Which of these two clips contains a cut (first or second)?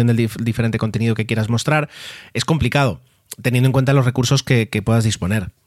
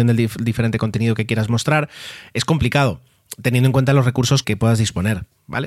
second